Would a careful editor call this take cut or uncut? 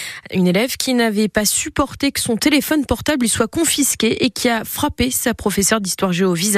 uncut